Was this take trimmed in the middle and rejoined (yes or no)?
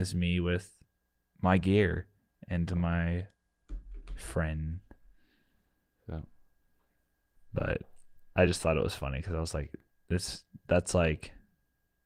no